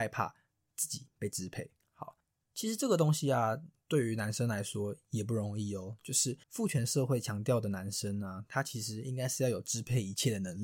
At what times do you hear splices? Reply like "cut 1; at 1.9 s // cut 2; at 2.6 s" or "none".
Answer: cut 1; at 1.8 s // cut 2; at 6.4 s